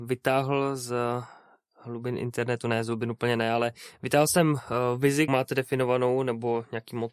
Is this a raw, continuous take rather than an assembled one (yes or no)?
no